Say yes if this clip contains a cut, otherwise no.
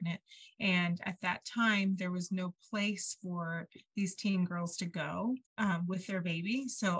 yes